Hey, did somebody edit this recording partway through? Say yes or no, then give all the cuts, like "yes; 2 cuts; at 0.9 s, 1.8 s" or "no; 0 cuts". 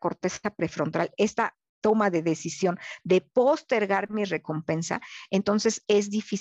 no; 0 cuts